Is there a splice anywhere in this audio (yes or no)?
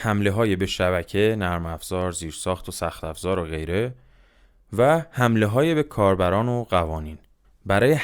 no